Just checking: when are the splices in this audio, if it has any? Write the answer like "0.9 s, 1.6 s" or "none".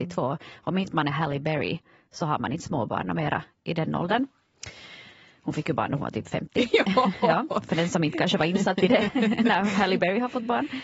none